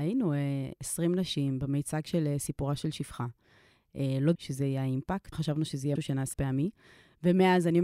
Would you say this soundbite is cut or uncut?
cut